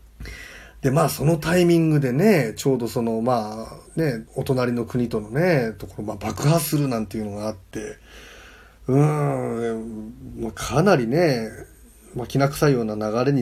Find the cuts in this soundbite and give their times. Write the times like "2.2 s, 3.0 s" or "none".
3.9 s, 4.3 s